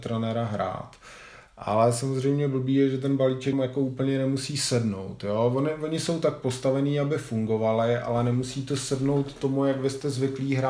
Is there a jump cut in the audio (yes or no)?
yes